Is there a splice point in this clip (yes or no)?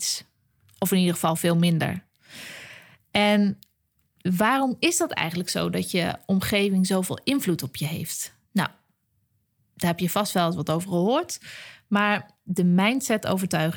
no